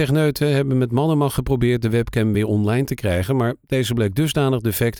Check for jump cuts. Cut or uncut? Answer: uncut